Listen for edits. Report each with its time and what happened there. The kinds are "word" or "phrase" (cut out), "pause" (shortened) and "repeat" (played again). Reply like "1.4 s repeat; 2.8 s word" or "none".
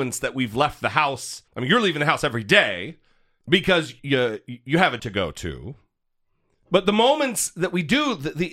1.5 s pause; 4.0 s word; 5.0 s word

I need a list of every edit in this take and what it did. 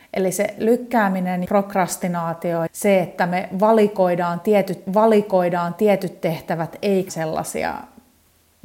1.4 s word; 2.7 s word; 4.9 s repeat; 7.1 s word

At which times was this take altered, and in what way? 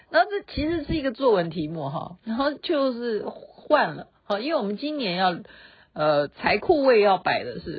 2.2 s pause

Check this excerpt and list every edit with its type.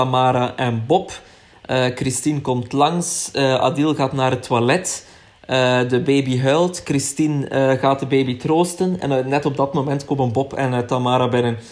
none

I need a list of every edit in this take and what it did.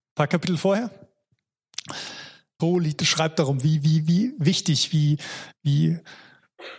2.6 s phrase; 3.0 s phrase

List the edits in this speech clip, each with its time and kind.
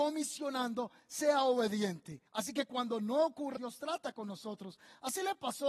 2.3 s pause; 3.6 s word

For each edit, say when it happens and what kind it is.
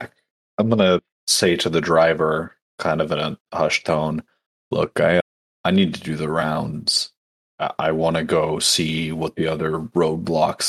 none

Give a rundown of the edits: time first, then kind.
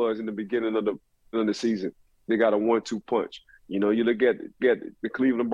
1.3 s word; 4.6 s repeat

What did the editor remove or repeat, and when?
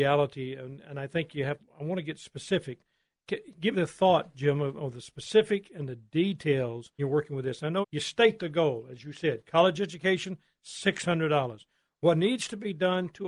1.6 s word; 3.7 s word; 7.0 s word; 7.8 s word

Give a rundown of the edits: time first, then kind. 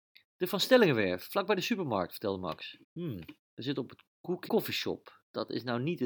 2.8 s pause; 4.5 s word

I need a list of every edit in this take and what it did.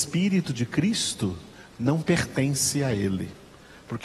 none

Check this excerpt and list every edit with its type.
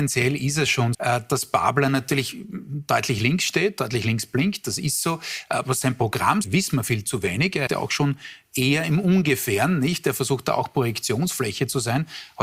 0.9 s word; 6.4 s phrase; 7.7 s phrase

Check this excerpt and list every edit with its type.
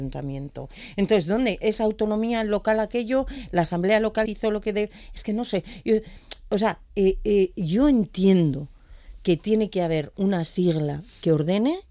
4.3 s word

